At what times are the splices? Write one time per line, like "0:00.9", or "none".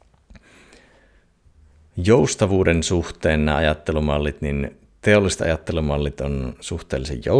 none